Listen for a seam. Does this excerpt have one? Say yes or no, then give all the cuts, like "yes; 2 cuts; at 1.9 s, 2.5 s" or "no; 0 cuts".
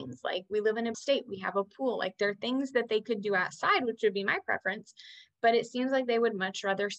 yes; 1 cut; at 0.9 s